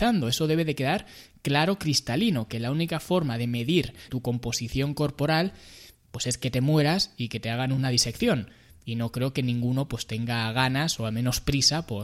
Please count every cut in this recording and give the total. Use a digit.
1